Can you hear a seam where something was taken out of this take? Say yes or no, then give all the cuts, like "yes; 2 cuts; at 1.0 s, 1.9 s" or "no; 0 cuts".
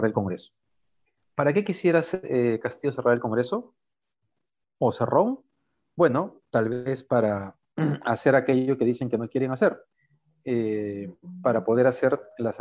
no; 0 cuts